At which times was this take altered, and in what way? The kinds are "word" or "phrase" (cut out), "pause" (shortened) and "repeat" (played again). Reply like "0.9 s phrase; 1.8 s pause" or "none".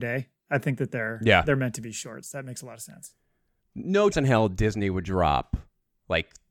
4.1 s word